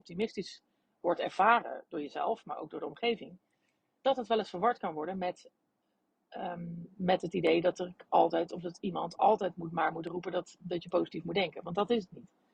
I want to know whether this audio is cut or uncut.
uncut